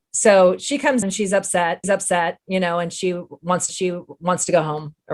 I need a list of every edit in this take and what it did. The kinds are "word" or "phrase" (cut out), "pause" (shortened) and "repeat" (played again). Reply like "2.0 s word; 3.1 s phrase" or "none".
1.0 s word; 1.8 s repeat; 3.7 s repeat